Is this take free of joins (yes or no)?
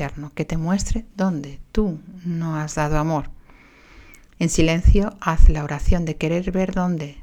no